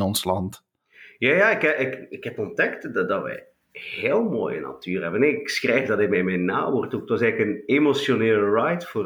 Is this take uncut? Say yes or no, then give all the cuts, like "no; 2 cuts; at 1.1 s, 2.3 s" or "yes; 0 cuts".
no; 1 cut; at 3.6 s